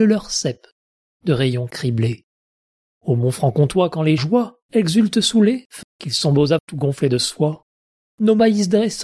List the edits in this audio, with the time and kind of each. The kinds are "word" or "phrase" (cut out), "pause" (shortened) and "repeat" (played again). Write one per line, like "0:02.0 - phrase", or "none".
0:02.5 - pause
0:04.2 - phrase
0:04.6 - pause
0:05.8 - phrase
0:06.6 - word

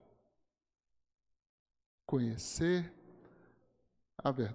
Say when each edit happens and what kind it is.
none

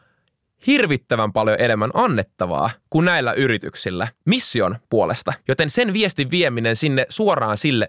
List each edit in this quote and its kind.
0:05.4 - pause

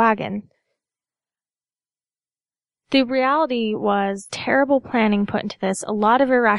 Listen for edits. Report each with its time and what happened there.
0:04.3 - phrase

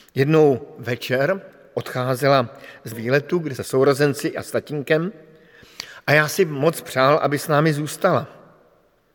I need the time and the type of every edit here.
0:02.9 - word
0:03.6 - phrase

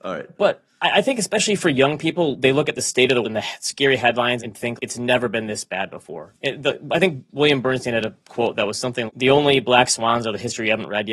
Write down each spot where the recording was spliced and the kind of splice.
0:03.2 - word
0:04.4 - word
0:04.8 - word
0:09.1 - word

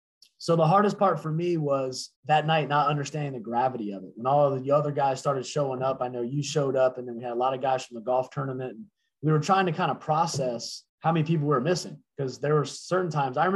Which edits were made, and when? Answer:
0:02.2 - pause
0:10.9 - pause

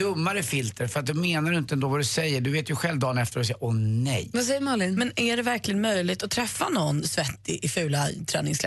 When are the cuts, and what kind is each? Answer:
none

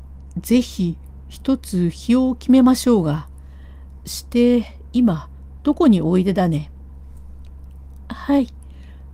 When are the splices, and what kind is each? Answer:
none

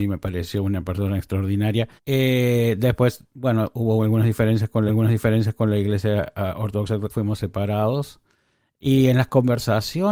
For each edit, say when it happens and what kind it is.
0:02.0 - pause
0:04.9 - repeat
0:07.1 - phrase

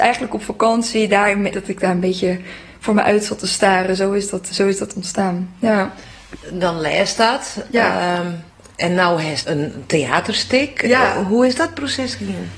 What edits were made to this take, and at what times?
0:01.5 - word
0:04.5 - word
0:06.4 - pause
0:08.5 - pause
0:09.4 - word

